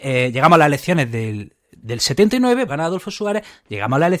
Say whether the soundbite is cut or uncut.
cut